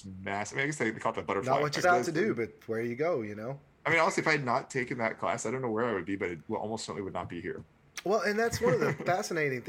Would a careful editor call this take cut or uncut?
cut